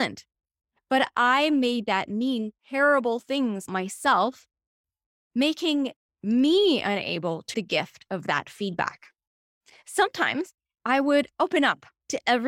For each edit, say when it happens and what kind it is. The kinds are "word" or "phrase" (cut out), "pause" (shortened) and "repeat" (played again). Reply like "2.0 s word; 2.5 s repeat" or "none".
2.6 s pause; 3.7 s word; 7.5 s word